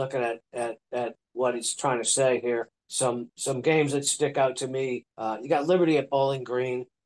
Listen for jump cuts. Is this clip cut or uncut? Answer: cut